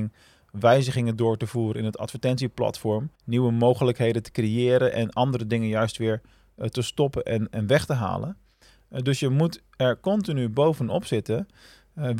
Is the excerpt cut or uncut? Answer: cut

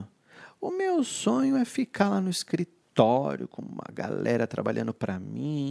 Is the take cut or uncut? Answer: uncut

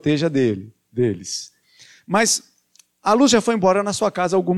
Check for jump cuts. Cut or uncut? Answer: uncut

